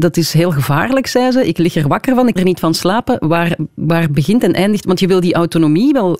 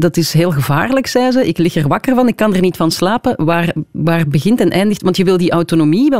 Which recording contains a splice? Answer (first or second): first